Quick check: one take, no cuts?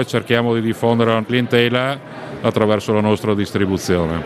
no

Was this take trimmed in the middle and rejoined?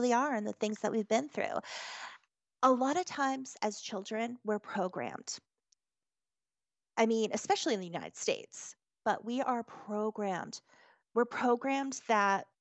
no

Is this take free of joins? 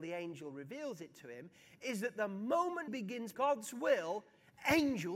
no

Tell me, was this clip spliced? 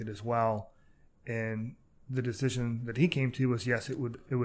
no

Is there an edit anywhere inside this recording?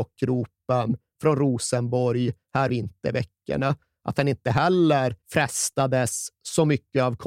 yes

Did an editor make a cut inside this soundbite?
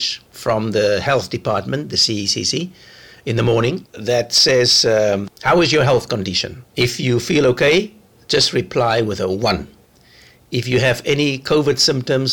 no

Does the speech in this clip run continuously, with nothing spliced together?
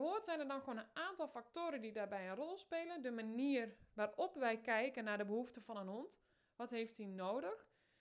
yes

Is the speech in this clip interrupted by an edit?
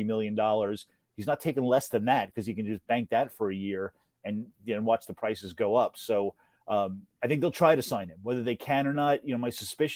no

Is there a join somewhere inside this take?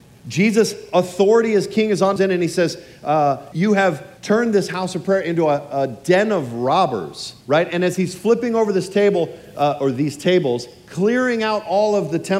yes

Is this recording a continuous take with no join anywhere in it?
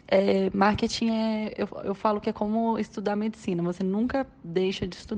yes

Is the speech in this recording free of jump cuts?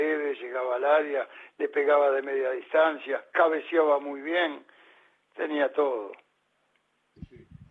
yes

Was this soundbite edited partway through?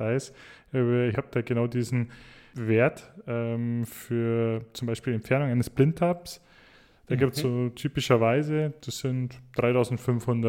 no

